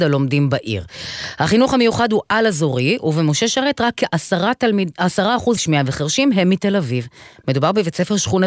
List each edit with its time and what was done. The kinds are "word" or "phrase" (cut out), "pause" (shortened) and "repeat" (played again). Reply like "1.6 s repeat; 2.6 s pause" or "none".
5.6 s phrase